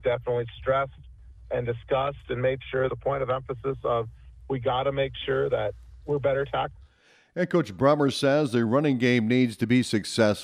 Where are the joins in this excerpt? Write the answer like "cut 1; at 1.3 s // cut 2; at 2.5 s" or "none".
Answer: cut 1; at 2.9 s